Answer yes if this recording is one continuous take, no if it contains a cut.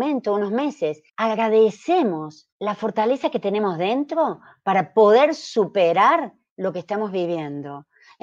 no